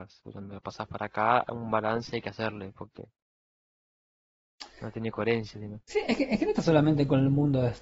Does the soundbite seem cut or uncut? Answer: cut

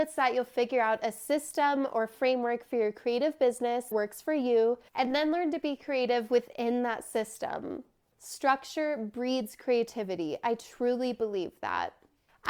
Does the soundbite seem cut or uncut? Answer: cut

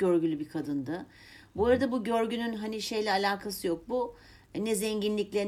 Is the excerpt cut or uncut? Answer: uncut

